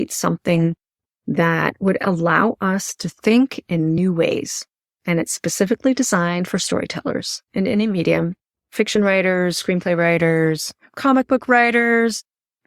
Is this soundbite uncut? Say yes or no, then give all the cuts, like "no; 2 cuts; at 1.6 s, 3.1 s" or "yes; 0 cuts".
yes; 0 cuts